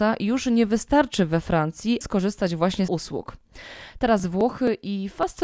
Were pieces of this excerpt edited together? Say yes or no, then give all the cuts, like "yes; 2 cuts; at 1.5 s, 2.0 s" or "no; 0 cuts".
yes; 2 cuts; at 2.0 s, 2.9 s